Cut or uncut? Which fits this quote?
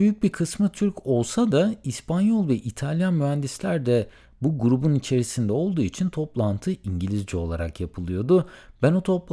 uncut